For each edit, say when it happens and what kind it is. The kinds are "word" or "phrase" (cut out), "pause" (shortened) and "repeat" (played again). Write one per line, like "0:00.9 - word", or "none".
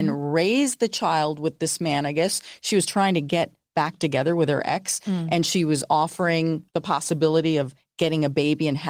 0:06.7 - pause